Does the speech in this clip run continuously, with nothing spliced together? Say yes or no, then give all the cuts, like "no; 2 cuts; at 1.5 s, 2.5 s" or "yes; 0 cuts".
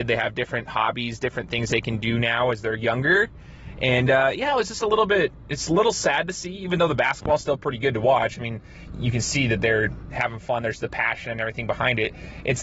yes; 0 cuts